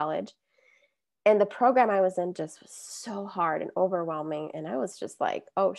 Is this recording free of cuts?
yes; 0 cuts

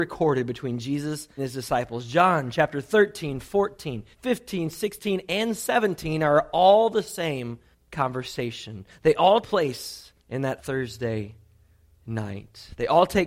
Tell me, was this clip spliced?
yes; 6 cuts; at 1.4 s, 4.1 s, 7.7 s, 9.4 s, 10.2 s, 10.6 s

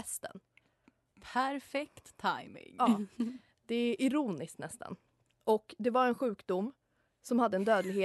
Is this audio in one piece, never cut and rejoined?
yes; 0 cuts

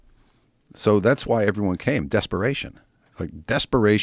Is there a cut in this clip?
no; 0 cuts

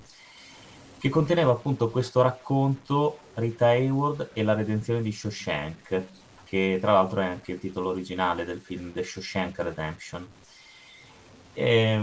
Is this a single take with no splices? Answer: yes; 0 cuts

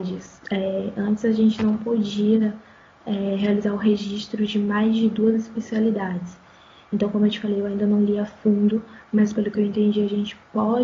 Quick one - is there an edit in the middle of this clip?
no; 0 cuts

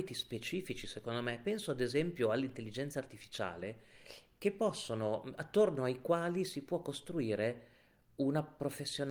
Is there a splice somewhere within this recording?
no; 0 cuts

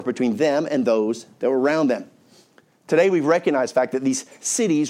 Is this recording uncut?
yes; 0 cuts

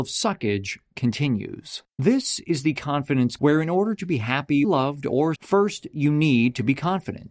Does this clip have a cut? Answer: yes; 4 cuts; at 1.9 s, 3.4 s, 4.6 s, 5.4 s

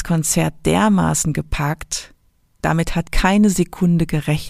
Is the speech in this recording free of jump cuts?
no; 1 cut; at 3.1 s

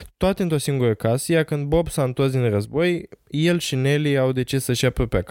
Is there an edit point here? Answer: no; 0 cuts

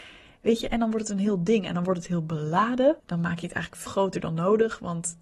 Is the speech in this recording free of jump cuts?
no; 2 cuts; at 3.0 s, 3.9 s

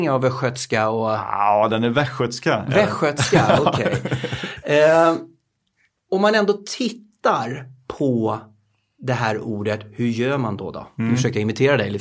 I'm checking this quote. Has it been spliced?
no; 0 cuts

